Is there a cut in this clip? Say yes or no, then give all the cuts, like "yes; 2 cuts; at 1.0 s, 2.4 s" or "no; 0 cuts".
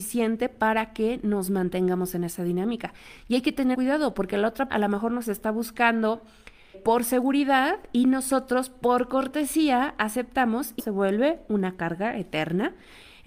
yes; 4 cuts; at 3.7 s, 4.7 s, 6.7 s, 10.8 s